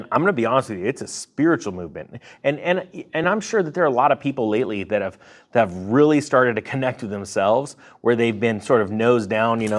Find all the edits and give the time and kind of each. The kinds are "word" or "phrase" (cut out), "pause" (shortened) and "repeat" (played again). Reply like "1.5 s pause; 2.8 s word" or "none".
none